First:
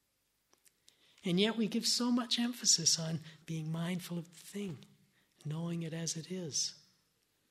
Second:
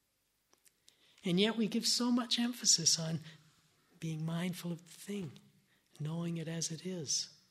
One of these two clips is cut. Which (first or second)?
first